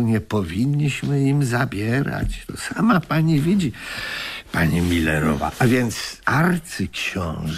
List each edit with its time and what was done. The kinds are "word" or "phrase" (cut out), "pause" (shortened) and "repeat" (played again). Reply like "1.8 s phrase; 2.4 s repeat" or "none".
6.2 s pause